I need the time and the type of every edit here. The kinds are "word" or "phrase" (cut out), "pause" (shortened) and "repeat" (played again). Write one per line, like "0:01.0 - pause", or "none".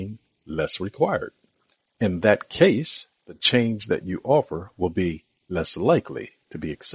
none